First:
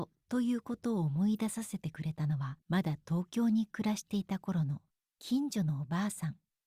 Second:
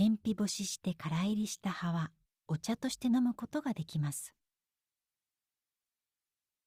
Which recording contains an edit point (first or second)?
first